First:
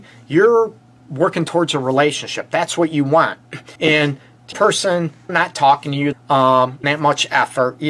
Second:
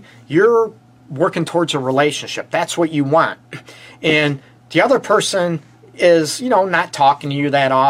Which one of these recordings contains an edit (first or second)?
first